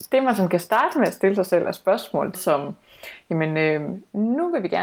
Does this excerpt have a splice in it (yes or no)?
yes